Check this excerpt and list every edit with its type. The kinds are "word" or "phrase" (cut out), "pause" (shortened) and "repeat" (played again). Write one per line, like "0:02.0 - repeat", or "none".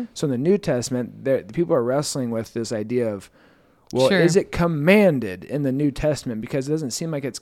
none